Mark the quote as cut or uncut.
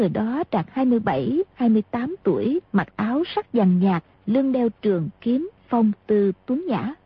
cut